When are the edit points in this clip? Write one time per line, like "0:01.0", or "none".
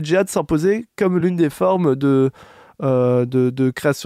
none